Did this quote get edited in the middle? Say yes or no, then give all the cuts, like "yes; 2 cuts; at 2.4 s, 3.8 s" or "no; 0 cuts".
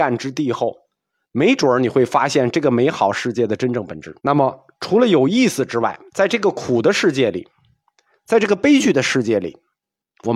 yes; 2 cuts; at 4.2 s, 6.1 s